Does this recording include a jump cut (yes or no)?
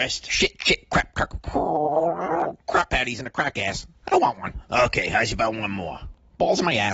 no